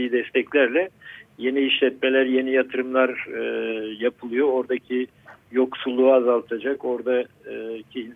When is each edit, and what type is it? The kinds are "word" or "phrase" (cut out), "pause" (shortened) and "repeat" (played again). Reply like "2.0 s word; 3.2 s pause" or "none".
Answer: none